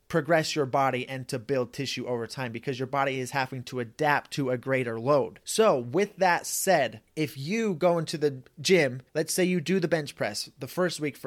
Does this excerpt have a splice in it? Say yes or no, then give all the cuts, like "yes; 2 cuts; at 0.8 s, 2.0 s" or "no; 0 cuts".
yes; 3 cuts; at 5.4 s, 7.1 s, 9.1 s